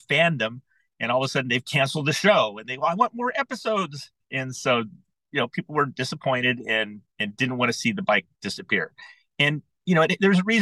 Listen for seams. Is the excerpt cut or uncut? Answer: cut